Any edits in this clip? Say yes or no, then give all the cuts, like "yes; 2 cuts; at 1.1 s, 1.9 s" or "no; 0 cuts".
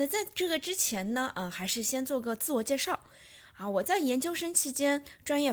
no; 0 cuts